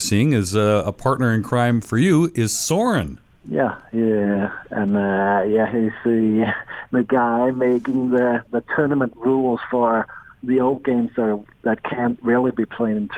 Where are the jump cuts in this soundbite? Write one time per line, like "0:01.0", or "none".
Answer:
none